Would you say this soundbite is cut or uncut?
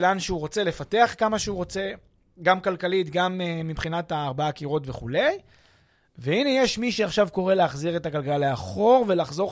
uncut